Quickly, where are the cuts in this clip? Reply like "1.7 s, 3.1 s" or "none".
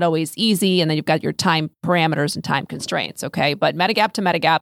none